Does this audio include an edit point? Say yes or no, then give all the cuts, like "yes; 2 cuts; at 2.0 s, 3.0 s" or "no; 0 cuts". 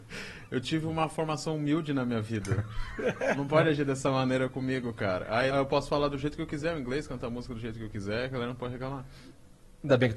yes; 1 cut; at 5.5 s